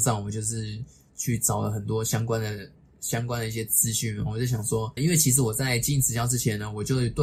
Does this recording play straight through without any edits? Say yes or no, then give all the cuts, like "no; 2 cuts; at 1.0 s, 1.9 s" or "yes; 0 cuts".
no; 1 cut; at 5.0 s